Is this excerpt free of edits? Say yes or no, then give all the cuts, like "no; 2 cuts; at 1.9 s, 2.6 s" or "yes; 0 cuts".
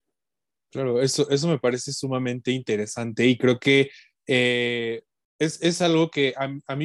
yes; 0 cuts